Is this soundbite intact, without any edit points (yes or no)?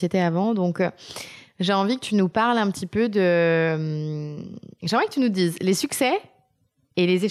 yes